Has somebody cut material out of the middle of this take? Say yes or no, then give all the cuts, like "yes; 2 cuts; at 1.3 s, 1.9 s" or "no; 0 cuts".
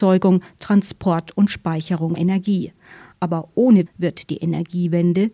yes; 2 cuts; at 2.2 s, 3.9 s